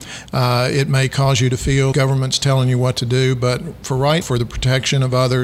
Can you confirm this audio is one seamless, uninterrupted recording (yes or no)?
no